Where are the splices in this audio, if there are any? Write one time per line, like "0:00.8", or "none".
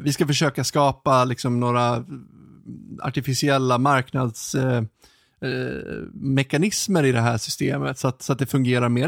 none

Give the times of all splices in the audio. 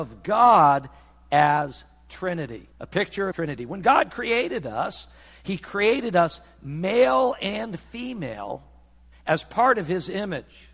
0:02.7
0:03.3

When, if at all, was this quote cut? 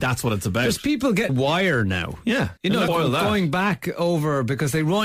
0:01.3
0:02.6
0:02.9

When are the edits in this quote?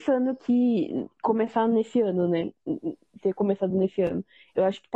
none

